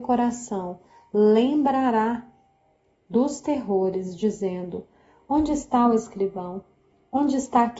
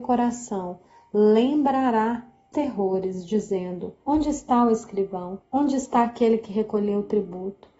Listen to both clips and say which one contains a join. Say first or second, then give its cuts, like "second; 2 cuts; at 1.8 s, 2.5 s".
second; 3 cuts; at 2.5 s, 4.0 s, 5.4 s